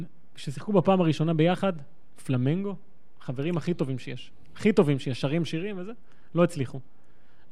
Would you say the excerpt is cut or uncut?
uncut